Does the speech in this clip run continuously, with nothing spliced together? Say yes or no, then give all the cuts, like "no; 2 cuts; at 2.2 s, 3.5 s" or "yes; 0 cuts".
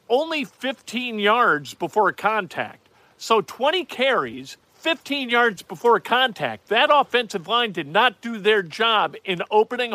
no; 1 cut; at 4.6 s